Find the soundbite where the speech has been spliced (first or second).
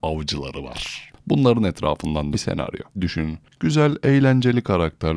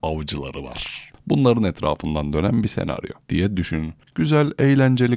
first